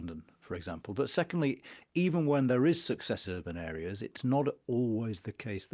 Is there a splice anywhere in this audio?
yes; 1 cut; at 3.2 s

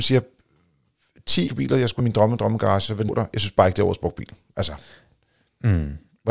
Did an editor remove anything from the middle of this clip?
yes; 3 cuts; at 1.5 s, 2.0 s, 3.1 s

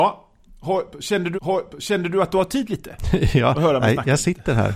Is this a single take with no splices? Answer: no; 1 cut; at 1.3 s

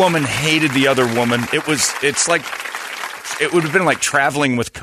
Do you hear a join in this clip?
no; 0 cuts

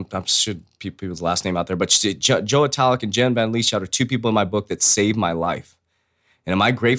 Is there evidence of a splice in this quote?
no; 0 cuts

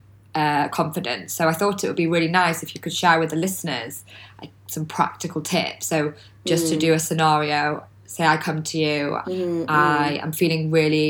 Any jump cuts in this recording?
yes; 1 cut; at 9.2 s

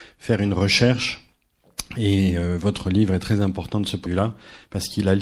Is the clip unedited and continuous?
no; 1 cut; at 4.1 s

